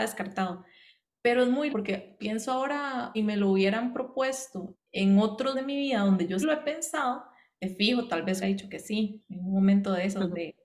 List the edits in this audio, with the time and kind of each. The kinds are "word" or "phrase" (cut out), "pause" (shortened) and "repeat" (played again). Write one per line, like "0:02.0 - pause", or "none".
0:01.7 - word
0:03.1 - word
0:04.7 - word
0:05.5 - word
0:06.4 - word
0:08.4 - word
0:09.2 - word